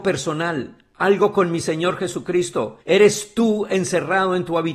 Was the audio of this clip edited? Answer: yes; 1 cut; at 2.8 s

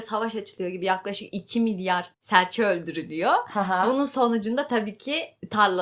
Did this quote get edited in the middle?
yes; 1 cut; at 2.1 s

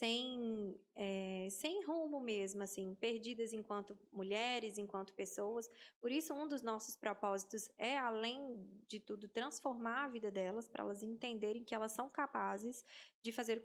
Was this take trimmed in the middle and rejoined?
no; 0 cuts

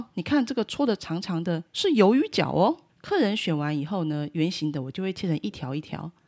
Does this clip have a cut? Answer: yes; 1 cut; at 2.9 s

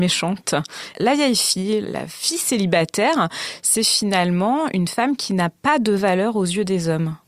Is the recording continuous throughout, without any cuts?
yes; 0 cuts

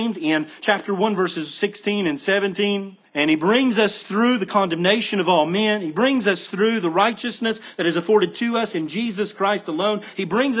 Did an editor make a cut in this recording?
yes; 1 cut; at 3.1 s

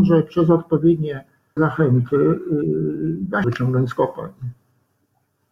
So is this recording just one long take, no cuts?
no; 2 cuts; at 1.6 s, 3.4 s

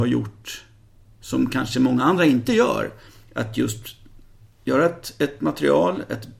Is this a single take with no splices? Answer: yes; 0 cuts

